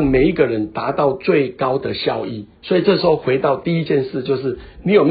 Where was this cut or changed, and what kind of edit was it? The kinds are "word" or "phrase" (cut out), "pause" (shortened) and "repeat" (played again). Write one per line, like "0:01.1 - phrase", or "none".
0:02.6 - pause